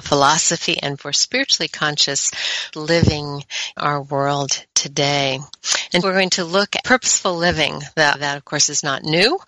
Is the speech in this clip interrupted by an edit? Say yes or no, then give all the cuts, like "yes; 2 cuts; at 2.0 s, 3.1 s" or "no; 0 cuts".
yes; 6 cuts; at 1.0 s, 2.7 s, 3.8 s, 6.0 s, 6.8 s, 8.1 s